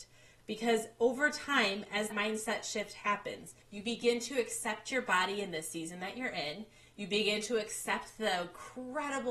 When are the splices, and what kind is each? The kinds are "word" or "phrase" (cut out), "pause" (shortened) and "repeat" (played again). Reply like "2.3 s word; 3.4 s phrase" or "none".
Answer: 2.1 s word; 3.6 s pause